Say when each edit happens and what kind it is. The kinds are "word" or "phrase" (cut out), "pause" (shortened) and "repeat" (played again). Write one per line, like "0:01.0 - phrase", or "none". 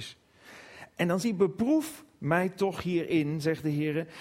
0:01.2 - word